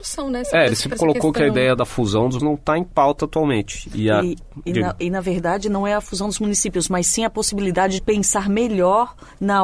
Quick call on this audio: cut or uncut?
cut